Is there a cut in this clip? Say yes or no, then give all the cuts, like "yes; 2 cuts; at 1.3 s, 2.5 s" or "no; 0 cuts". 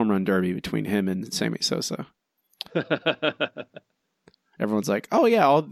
no; 0 cuts